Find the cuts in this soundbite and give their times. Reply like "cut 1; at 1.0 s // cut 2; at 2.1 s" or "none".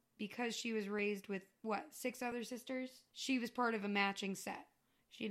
cut 1; at 3.1 s